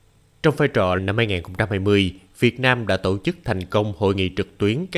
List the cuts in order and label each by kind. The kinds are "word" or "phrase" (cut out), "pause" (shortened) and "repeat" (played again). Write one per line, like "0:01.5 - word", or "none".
0:01.0 - phrase

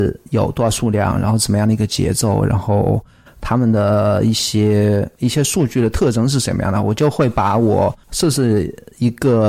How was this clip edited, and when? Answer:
none

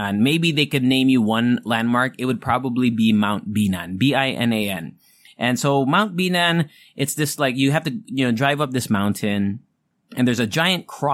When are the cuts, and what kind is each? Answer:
none

